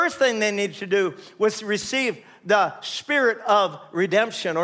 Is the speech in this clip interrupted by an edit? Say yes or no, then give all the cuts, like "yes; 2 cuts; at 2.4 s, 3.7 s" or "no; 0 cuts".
no; 0 cuts